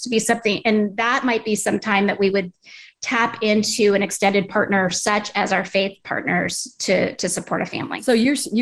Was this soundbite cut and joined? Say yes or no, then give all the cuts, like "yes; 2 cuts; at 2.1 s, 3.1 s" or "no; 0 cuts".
no; 0 cuts